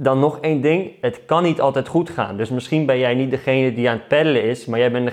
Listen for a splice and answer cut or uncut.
uncut